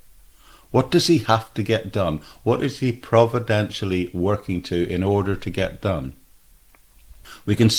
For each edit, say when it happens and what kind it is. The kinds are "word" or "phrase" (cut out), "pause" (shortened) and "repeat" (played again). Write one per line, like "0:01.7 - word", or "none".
none